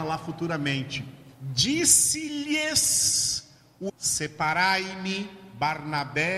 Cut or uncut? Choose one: cut